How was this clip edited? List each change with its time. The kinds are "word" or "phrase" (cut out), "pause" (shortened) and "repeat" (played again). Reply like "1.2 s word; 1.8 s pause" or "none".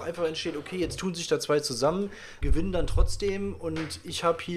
2.4 s word